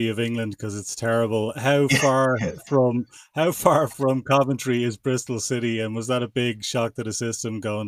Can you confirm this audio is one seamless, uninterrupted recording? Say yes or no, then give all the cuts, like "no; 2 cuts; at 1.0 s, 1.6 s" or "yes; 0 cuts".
yes; 0 cuts